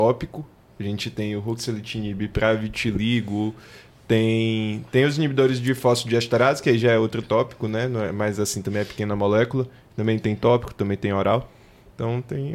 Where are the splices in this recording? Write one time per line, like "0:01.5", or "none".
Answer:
none